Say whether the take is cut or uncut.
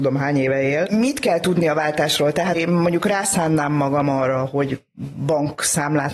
cut